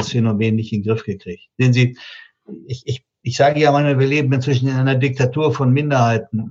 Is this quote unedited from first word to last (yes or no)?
no